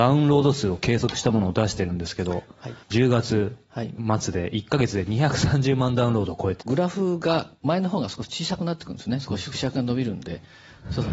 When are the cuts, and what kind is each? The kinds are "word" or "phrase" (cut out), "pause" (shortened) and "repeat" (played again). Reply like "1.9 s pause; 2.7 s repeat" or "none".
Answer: 2.8 s pause; 6.6 s phrase